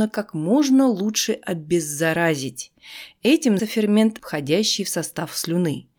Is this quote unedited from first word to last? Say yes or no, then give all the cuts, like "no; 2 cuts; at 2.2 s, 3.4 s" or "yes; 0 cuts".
no; 2 cuts; at 3.6 s, 4.2 s